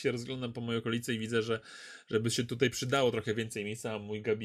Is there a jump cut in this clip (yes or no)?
no